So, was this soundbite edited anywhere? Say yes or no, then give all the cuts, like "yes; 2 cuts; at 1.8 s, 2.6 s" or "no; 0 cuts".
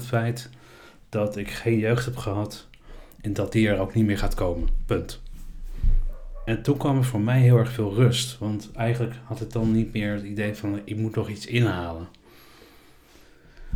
no; 0 cuts